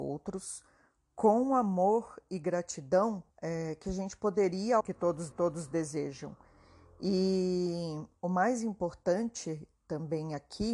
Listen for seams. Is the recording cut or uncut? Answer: cut